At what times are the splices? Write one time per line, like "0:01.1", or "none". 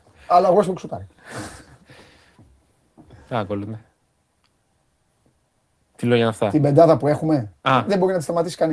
none